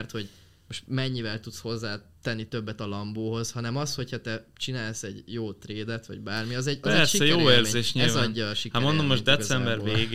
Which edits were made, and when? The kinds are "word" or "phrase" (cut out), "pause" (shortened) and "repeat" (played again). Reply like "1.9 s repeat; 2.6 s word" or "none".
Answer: none